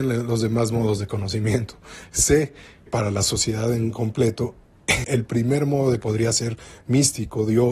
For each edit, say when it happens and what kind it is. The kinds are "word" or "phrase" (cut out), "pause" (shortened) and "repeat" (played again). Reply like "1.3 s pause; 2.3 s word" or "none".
2.9 s word; 5.0 s word; 6.0 s word

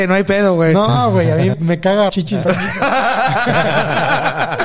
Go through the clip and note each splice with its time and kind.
1.5 s word; 2.1 s word; 2.4 s word

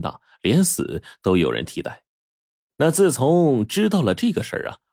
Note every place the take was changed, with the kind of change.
2.1 s pause

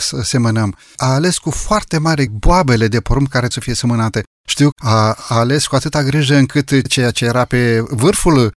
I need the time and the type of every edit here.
2.3 s word; 3.5 s word; 4.7 s word

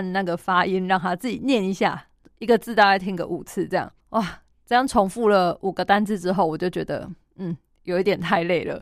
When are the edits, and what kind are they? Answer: 4.0 s pause

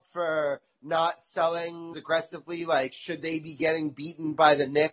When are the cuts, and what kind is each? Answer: 1.9 s phrase

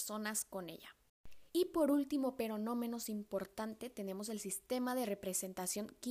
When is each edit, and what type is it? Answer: 1.5 s pause

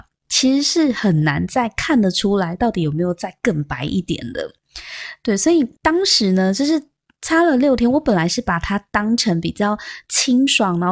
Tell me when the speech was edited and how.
5.8 s pause

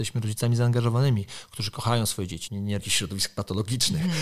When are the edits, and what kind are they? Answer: 2.5 s word; 2.8 s word

